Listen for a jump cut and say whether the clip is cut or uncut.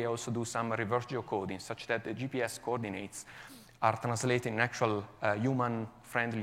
uncut